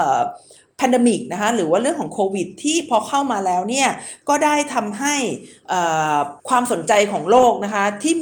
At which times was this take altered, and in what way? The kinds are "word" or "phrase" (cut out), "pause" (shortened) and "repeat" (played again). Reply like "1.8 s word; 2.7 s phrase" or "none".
6.4 s pause